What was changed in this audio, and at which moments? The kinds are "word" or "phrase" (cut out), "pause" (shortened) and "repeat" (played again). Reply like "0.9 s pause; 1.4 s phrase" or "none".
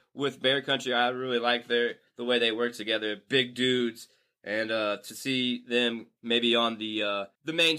none